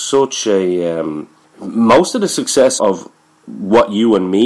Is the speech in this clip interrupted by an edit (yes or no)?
yes